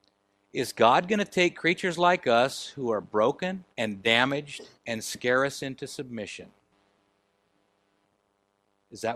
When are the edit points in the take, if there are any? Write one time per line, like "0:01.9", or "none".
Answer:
0:03.7
0:04.7